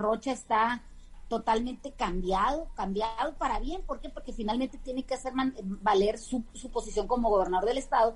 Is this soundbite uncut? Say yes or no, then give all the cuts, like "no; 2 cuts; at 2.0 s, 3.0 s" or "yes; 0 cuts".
yes; 0 cuts